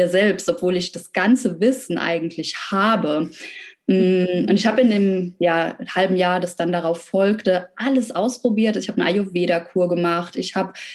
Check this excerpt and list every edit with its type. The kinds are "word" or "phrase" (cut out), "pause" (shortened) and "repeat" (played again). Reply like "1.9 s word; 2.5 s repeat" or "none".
none

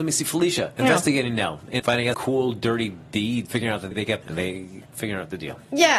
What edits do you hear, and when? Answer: 1.8 s word; 2.1 s word; 3.5 s word; 3.9 s word; 4.2 s word; 4.9 s word

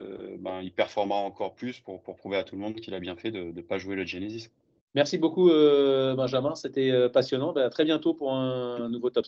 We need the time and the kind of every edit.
4.8 s pause

